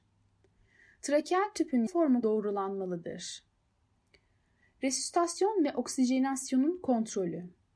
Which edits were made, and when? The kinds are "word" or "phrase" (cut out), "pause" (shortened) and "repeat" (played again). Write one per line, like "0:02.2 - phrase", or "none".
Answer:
0:01.9 - phrase
0:02.2 - phrase